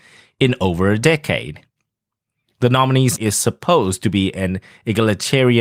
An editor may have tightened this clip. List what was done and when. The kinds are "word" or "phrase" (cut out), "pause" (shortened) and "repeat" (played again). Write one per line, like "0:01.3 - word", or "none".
0:03.2 - word